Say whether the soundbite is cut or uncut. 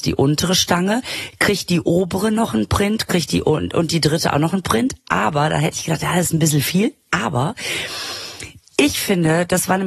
uncut